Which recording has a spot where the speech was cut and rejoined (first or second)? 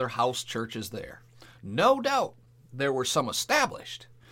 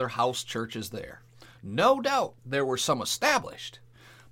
second